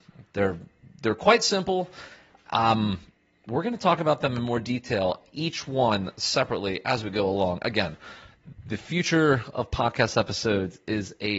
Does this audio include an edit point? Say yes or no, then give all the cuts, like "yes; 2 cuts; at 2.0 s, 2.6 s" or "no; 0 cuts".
no; 0 cuts